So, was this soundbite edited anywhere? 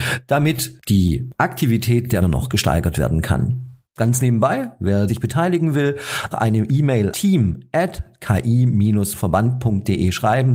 yes; 4 cuts; at 2.2 s, 5.1 s, 6.3 s, 7.1 s

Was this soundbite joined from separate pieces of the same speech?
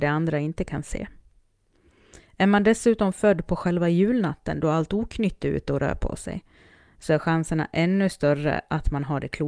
no; 0 cuts

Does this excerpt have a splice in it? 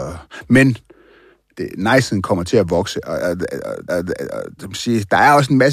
yes; 1 cut; at 3.9 s

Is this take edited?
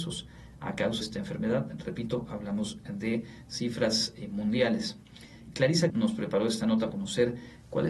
yes; 3 cuts; at 1.0 s, 5.9 s, 6.9 s

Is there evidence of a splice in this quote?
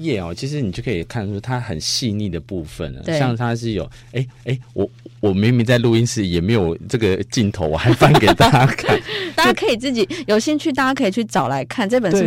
yes; 2 cuts; at 4.3 s, 9.3 s

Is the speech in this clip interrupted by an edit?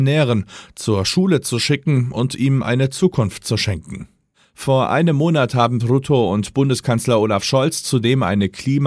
yes; 1 cut; at 5.8 s

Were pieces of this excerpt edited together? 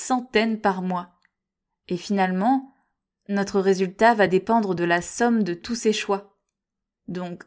no; 0 cuts

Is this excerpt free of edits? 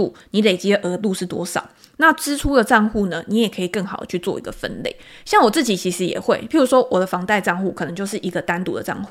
yes; 0 cuts

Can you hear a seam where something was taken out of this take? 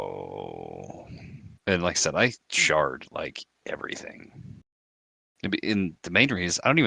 yes; 1 cut; at 1.6 s

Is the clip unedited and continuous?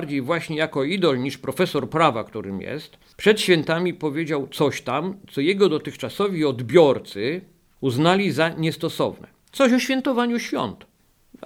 yes; 0 cuts

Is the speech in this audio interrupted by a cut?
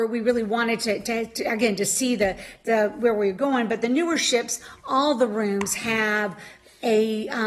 no; 0 cuts

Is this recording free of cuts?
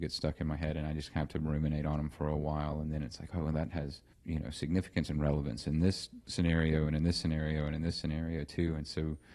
no; 1 cut; at 4.1 s

